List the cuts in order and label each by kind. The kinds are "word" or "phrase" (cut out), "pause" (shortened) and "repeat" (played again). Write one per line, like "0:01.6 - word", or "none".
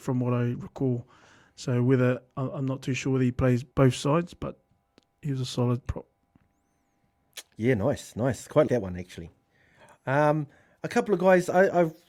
0:03.7 - pause
0:05.9 - word
0:08.7 - word